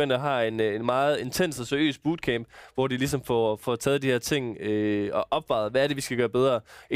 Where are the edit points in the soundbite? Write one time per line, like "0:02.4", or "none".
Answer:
none